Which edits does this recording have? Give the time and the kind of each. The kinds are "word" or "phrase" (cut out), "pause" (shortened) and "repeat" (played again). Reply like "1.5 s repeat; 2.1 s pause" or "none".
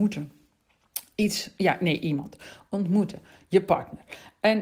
none